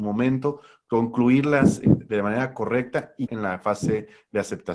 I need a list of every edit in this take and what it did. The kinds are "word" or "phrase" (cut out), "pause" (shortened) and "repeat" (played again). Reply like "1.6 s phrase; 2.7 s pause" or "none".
1.8 s word; 3.3 s word

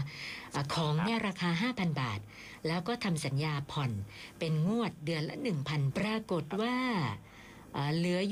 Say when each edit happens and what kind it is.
5.9 s phrase

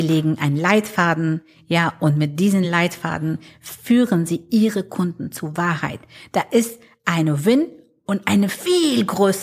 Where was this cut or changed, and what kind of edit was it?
none

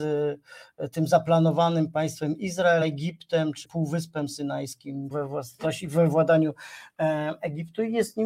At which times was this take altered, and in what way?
2.8 s word; 3.6 s word; 5.1 s phrase

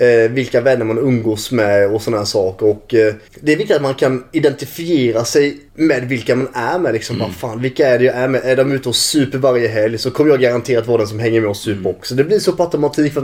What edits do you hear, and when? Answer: 3.3 s pause; 5.7 s pause

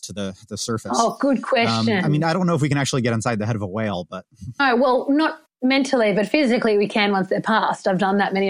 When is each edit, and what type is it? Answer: none

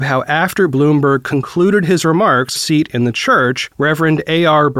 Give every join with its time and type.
2.6 s phrase

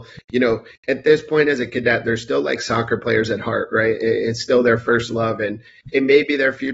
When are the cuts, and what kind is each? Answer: none

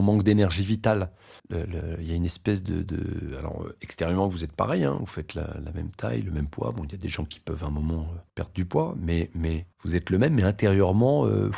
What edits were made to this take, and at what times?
1.4 s pause; 8.3 s pause; 9.7 s pause

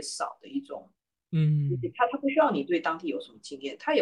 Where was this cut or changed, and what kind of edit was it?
none

